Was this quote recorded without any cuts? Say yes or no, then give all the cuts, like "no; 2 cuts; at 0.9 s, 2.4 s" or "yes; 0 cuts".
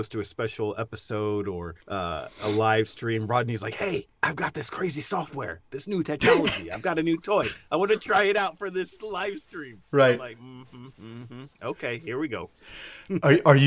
no; 3 cuts; at 1.8 s, 4.1 s, 10.9 s